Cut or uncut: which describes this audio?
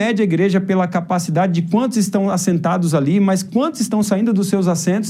uncut